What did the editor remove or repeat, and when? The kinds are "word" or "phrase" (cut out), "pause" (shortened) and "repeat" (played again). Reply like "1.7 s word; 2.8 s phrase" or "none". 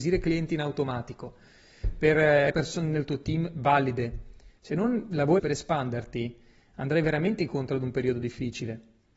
2.5 s word; 5.4 s word